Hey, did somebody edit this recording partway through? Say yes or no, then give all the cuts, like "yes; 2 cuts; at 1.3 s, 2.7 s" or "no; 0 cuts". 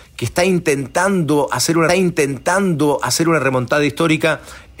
yes; 1 cut; at 1.9 s